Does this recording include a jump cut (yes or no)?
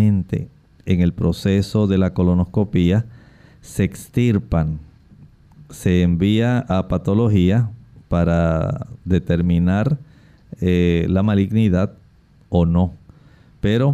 no